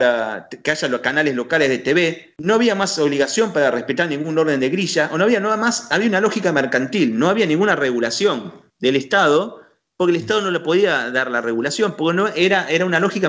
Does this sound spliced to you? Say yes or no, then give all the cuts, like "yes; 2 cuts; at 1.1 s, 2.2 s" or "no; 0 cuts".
yes; 1 cut; at 8.7 s